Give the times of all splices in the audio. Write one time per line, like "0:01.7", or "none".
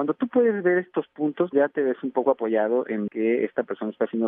0:01.5
0:03.1

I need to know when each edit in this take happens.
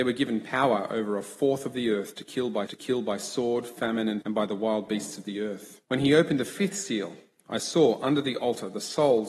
0:02.7
0:04.2
0:05.8

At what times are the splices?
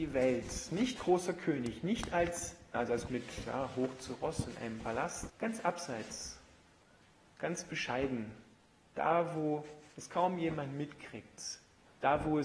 0:01.0
0:02.7
0:03.1
0:05.3
0:09.9

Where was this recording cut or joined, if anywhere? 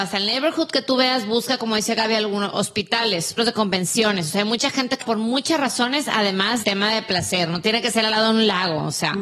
0:03.4
0:05.0
0:06.6

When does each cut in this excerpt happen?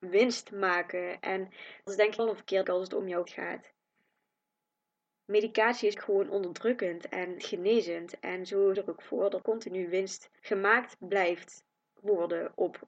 0:01.9
0:02.2
0:02.6
0:03.2
0:05.9
0:07.4
0:08.7
0:09.4
0:10.4

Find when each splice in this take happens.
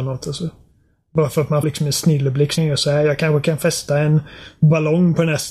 0:01.6
0:02.6

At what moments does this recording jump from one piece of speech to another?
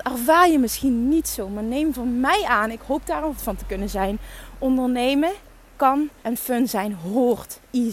0:03.4
0:06.2

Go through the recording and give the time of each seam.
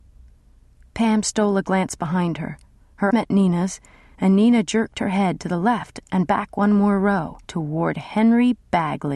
0:03.1
0:07.4

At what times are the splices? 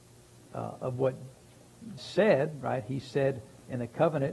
0:02.0

